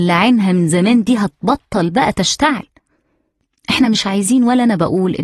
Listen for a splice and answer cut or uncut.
uncut